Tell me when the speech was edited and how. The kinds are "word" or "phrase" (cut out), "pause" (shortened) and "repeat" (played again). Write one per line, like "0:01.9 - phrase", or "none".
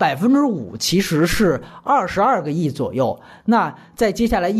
none